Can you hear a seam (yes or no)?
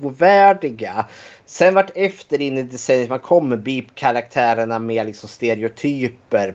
no